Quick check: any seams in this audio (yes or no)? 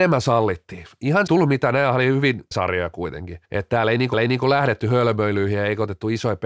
yes